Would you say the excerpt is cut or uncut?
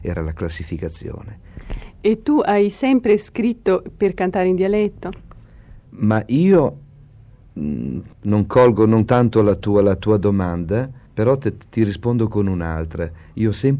cut